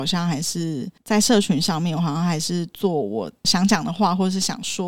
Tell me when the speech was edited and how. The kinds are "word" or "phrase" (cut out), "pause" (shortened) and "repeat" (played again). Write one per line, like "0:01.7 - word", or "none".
none